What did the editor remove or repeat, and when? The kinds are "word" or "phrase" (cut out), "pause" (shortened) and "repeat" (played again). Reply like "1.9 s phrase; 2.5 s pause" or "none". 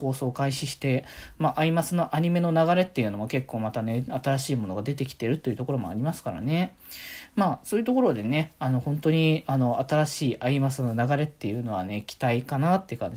none